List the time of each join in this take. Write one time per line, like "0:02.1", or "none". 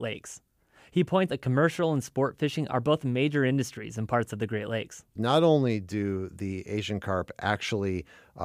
0:01.3